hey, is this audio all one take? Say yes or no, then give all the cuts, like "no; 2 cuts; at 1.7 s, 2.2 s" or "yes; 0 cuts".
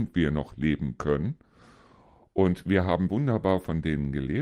no; 1 cut; at 3.1 s